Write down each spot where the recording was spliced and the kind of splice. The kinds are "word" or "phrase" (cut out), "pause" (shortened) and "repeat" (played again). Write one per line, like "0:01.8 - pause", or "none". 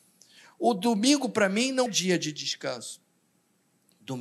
0:01.9 - word